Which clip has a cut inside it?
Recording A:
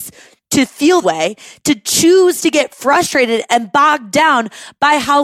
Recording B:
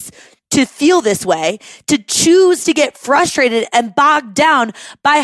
A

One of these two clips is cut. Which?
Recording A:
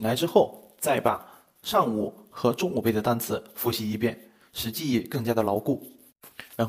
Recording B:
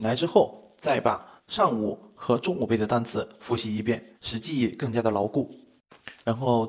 B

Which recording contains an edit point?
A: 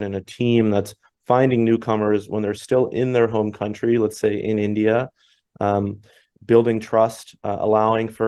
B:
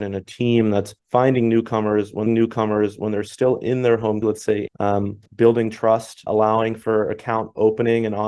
B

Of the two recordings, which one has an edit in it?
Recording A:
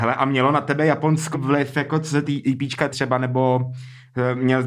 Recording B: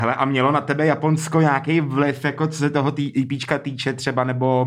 A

